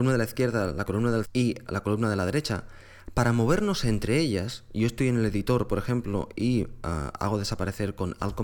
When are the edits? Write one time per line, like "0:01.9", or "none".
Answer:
0:01.2
0:01.7